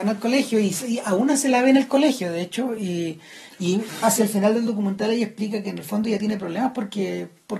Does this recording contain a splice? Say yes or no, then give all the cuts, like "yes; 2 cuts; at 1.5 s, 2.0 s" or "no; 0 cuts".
no; 0 cuts